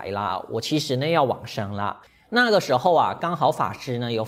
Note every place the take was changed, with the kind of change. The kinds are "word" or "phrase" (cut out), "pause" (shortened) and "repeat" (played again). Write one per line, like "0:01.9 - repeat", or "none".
0:02.0 - pause